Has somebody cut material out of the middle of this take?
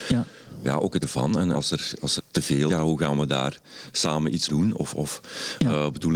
yes; 5 cuts; at 1.0 s, 1.5 s, 2.2 s, 2.7 s, 4.5 s

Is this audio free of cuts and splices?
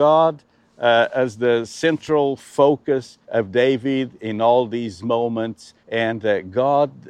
no; 2 cuts; at 3.2 s, 5.8 s

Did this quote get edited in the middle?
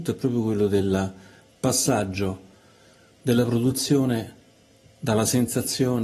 no; 0 cuts

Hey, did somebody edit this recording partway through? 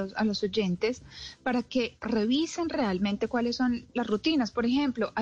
no; 0 cuts

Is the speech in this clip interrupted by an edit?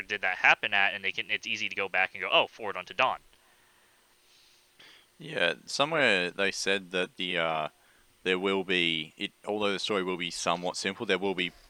no; 0 cuts

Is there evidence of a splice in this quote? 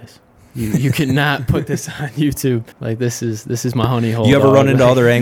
yes; 1 cut; at 2.7 s

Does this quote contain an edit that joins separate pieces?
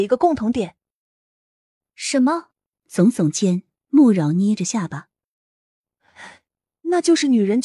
yes; 1 cut; at 2.7 s

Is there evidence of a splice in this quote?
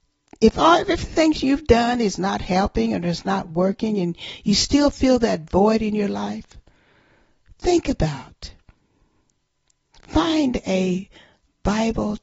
no; 0 cuts

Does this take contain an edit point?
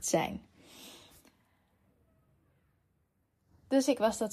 no; 0 cuts

